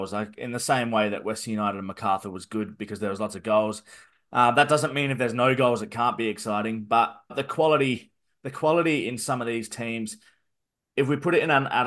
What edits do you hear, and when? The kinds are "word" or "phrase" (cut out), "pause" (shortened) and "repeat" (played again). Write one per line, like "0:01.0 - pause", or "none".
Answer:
0:07.3 - word